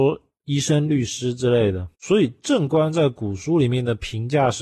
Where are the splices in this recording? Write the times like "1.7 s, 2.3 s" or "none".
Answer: 1.9 s